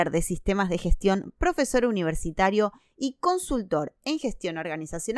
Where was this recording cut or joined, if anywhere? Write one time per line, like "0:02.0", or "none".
none